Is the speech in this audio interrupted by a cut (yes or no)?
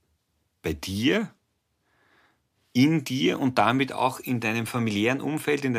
no